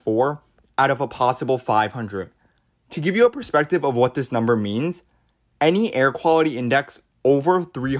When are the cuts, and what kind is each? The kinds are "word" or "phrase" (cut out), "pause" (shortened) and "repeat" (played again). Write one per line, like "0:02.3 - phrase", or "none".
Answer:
none